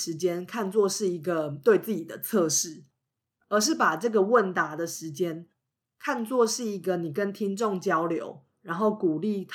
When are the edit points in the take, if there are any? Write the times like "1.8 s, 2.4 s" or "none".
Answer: none